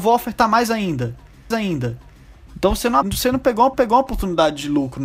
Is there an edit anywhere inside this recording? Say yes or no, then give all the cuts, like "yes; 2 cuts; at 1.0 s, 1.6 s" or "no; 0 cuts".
yes; 3 cuts; at 1.5 s, 3.0 s, 3.7 s